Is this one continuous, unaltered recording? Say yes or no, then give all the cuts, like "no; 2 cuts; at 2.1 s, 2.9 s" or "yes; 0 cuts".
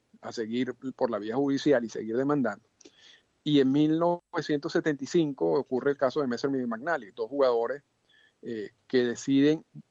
yes; 0 cuts